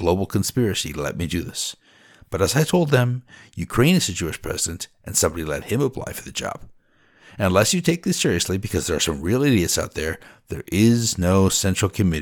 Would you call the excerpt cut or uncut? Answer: uncut